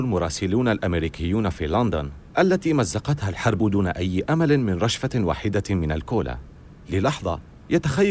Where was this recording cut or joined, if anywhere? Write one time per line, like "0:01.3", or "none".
0:02.3